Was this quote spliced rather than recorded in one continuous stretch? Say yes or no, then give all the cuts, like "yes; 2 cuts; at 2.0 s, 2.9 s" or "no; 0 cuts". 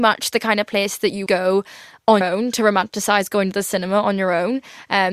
yes; 2 cuts; at 1.3 s, 2.2 s